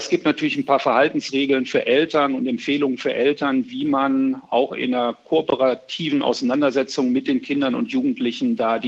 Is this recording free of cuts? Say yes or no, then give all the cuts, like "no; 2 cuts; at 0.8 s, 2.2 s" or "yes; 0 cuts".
yes; 0 cuts